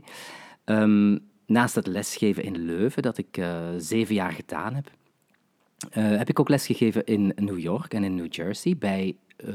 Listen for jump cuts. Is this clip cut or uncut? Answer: uncut